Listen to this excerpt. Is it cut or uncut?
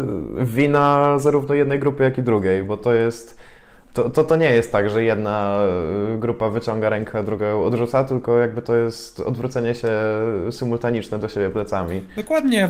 uncut